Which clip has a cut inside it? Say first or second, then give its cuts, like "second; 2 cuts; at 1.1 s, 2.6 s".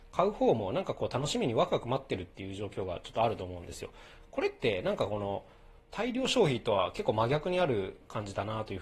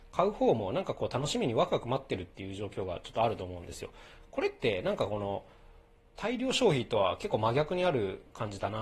first; 1 cut; at 5.8 s